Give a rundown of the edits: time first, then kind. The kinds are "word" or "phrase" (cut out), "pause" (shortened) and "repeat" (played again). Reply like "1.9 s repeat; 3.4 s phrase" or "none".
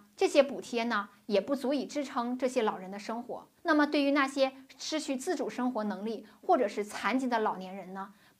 3.6 s pause